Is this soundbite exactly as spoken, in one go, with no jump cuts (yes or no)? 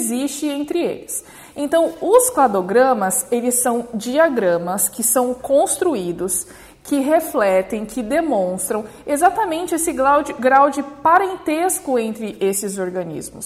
yes